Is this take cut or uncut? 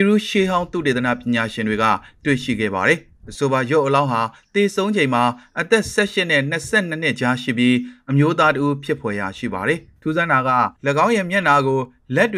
cut